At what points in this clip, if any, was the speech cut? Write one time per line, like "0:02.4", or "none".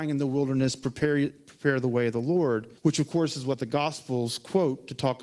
0:02.8